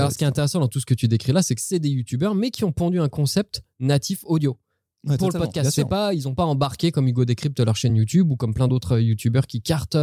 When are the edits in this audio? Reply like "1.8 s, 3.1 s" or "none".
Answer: none

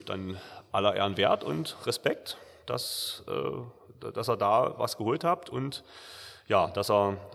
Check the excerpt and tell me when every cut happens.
none

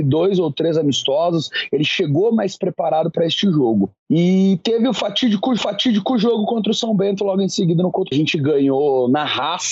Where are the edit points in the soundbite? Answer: 5.6 s, 8.1 s

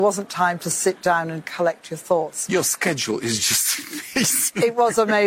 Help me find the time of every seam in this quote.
none

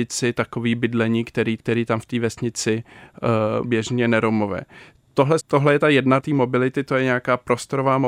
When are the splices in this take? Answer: 1.6 s, 3.6 s, 5.4 s, 6.2 s

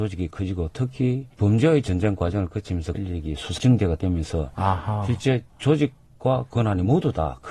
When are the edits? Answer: 1.3 s, 2.9 s, 3.6 s

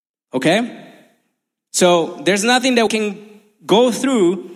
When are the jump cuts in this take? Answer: 2.9 s

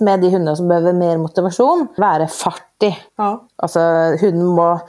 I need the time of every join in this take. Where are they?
2.0 s, 3.1 s

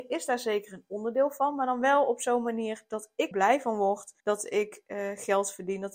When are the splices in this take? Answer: 3.3 s, 4.2 s

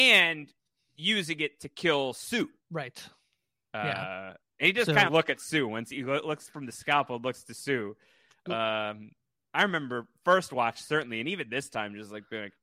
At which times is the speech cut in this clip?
2.6 s, 5.1 s

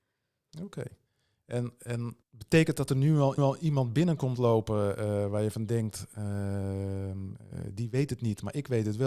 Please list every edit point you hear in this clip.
2.2 s, 2.9 s, 3.4 s

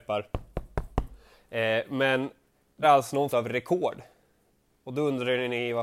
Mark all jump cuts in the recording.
2.8 s, 3.3 s

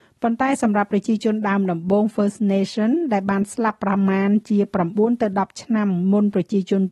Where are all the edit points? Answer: none

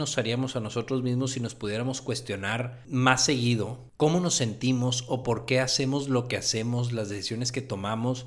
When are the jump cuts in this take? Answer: none

